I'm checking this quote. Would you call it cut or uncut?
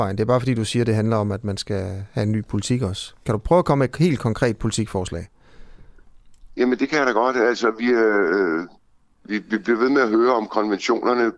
uncut